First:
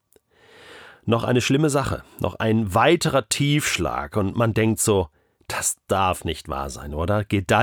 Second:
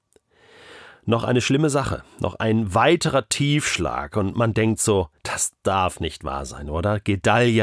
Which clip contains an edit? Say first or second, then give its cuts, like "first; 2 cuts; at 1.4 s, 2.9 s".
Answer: second; 1 cut; at 5.2 s